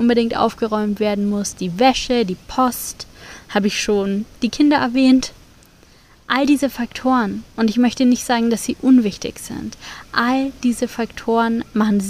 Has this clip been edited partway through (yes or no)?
no